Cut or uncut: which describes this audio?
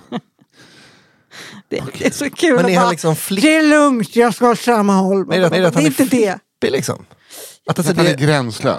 cut